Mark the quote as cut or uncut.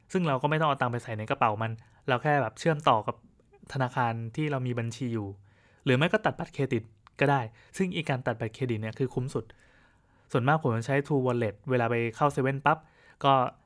uncut